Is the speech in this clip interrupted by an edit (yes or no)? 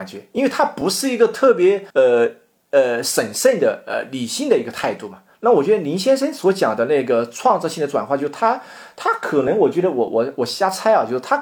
yes